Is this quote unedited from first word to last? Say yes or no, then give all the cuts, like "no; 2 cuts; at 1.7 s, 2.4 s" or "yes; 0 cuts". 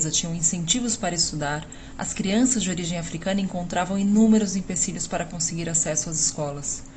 yes; 0 cuts